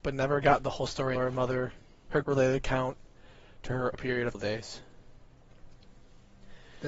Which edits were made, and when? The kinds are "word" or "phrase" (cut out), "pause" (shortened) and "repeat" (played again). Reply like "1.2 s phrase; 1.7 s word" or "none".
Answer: 1.2 s word; 2.2 s word; 3.9 s word; 4.3 s word